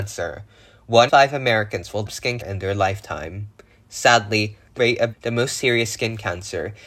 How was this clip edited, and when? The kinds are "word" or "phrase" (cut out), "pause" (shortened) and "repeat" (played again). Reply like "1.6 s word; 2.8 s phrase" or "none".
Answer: 1.1 s word; 2.1 s word; 2.4 s word; 4.8 s word; 5.1 s word

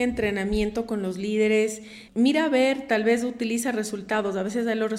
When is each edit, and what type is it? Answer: 2.1 s word

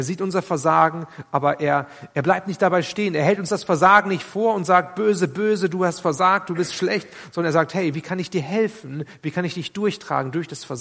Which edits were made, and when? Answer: none

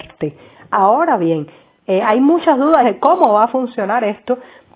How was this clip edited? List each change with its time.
2.8 s phrase

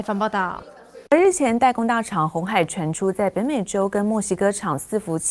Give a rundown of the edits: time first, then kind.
1.1 s pause

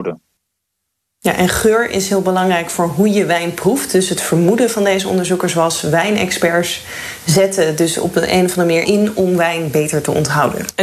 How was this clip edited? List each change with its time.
8.8 s phrase

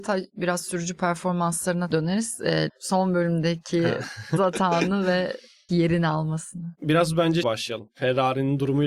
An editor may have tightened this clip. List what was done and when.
1.9 s word; 2.7 s word; 4.4 s word; 5.7 s word; 7.4 s word

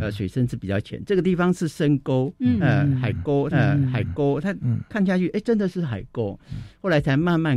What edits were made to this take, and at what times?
3.5 s repeat

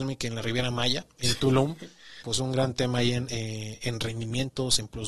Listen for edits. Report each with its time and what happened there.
2.2 s phrase

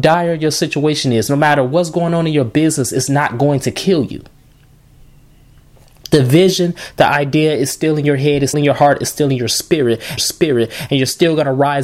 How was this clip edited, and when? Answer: 8.5 s word; 10.2 s repeat

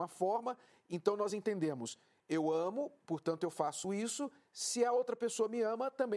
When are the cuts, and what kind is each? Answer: none

